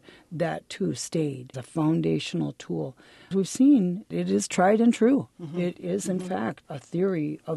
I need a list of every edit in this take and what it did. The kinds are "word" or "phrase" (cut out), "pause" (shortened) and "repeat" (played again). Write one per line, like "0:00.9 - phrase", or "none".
0:01.5 - word
0:03.3 - word
0:04.1 - word
0:05.7 - word

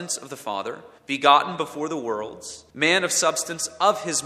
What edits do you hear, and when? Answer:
0:01.0 - pause
0:02.7 - pause

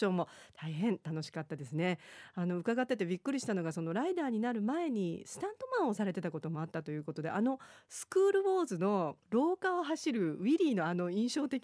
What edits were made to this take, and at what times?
0:09.2 - pause

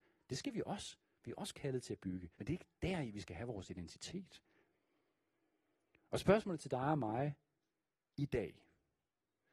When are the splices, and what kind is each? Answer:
0:02.3 - pause

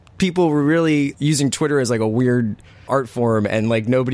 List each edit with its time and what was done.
0:01.1 - word
0:02.9 - word

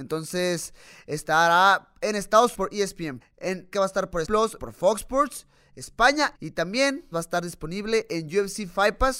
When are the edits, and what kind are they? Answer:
0:02.5 - word
0:03.2 - word
0:03.7 - word
0:04.2 - word
0:04.6 - word
0:06.3 - word
0:07.1 - word

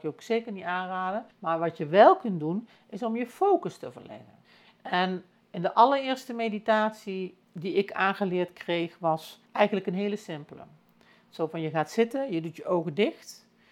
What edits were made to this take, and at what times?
0:01.3 - pause
0:04.4 - pause
0:07.4 - pause
0:09.5 - pause

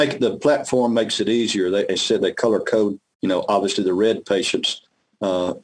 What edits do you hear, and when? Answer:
0:01.9 - word

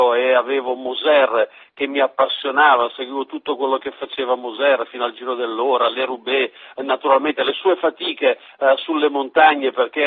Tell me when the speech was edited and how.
none

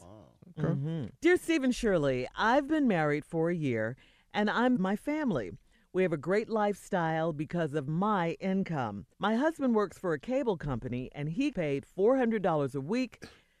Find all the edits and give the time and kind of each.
0:01.2 - pause
0:04.8 - phrase
0:09.1 - pause
0:11.5 - word

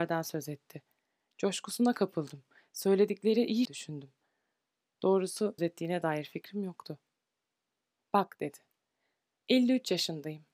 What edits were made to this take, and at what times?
0:03.6 - phrase
0:05.6 - phrase

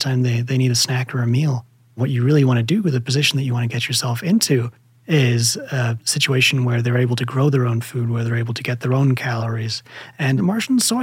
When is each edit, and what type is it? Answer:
none

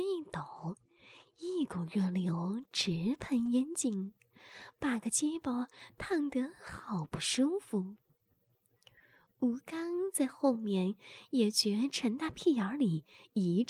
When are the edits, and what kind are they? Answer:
none

